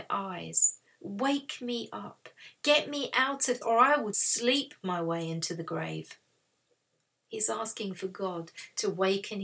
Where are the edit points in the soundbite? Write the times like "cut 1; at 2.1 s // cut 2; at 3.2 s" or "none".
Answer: cut 1; at 3.6 s // cut 2; at 4.1 s